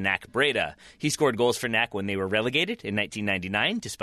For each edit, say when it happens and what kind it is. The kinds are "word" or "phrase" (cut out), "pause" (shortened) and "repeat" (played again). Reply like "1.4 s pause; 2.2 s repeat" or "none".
none